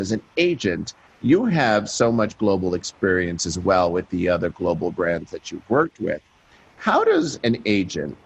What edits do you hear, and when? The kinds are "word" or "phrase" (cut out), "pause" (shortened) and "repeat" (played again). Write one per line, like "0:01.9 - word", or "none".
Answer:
none